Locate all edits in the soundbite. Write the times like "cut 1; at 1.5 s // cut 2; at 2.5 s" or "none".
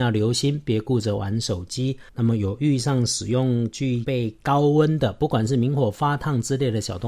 cut 1; at 2.1 s

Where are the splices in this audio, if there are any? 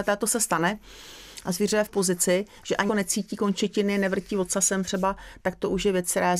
cut 1; at 1.9 s // cut 2; at 2.9 s

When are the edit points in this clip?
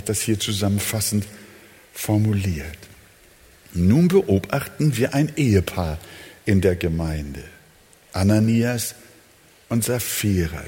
none

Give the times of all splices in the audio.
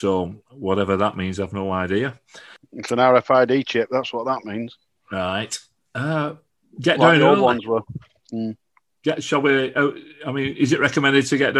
none

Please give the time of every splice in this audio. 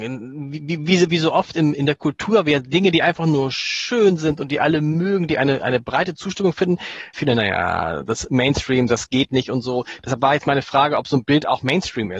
cut 1; at 1.1 s // cut 2; at 7.1 s

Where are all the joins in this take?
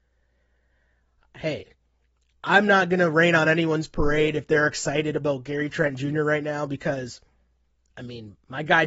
none

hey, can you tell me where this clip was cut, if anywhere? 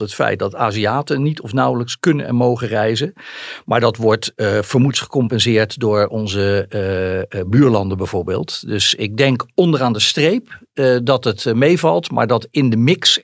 cut 1; at 4.9 s

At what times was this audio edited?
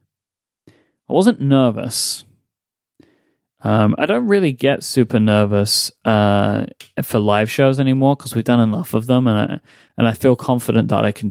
none

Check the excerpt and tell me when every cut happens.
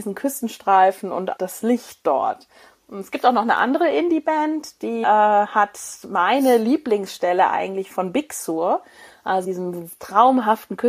cut 1; at 1.4 s // cut 2; at 5.0 s // cut 3; at 7.9 s // cut 4; at 9.4 s

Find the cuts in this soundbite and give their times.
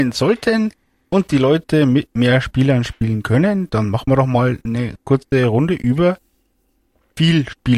none

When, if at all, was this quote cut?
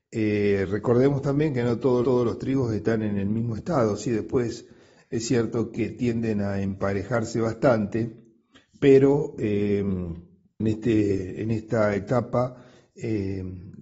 cut 1; at 2.0 s // cut 2; at 10.6 s

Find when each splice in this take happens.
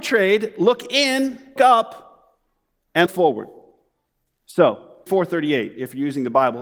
cut 1; at 1.6 s // cut 2; at 3.1 s // cut 3; at 5.1 s

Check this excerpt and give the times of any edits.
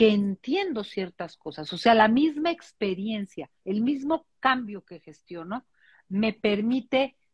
cut 1; at 3.6 s

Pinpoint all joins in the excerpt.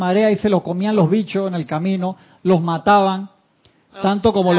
none

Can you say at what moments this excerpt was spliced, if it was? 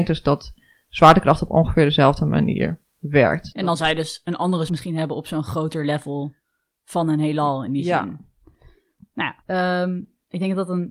cut 1; at 4.7 s // cut 2; at 9.4 s

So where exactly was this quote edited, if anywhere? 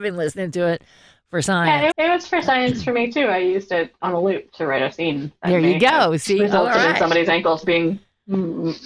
cut 1; at 1.9 s

